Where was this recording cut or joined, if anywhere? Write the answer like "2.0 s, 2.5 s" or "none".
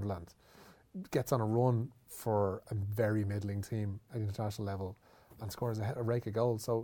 none